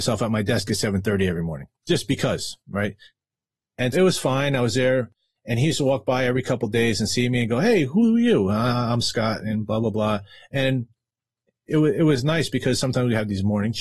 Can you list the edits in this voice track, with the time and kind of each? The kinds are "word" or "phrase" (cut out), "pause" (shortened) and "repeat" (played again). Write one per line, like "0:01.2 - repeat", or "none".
0:02.6 - pause
0:03.9 - word